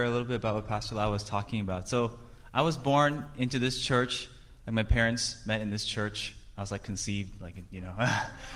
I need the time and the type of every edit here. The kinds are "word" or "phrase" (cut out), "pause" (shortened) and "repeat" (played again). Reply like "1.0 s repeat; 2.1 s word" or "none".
none